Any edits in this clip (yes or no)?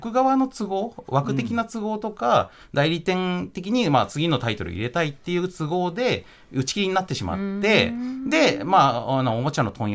no